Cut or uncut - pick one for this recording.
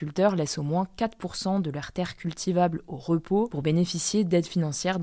uncut